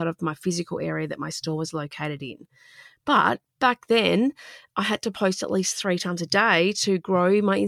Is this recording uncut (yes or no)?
yes